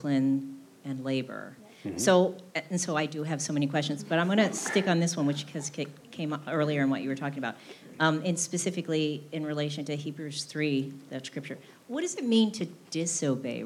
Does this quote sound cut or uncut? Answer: uncut